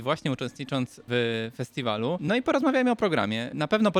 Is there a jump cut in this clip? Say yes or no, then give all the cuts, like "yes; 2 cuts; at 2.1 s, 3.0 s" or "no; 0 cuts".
no; 0 cuts